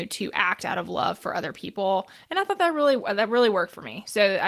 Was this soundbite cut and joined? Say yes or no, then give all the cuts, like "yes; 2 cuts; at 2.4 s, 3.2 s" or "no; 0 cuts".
no; 0 cuts